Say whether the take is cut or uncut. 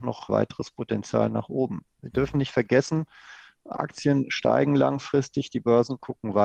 uncut